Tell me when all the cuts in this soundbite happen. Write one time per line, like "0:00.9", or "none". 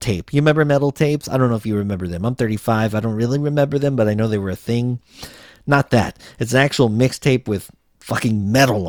none